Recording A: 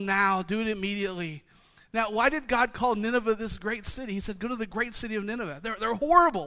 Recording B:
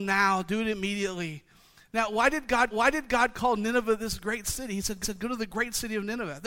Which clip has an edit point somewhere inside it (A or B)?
B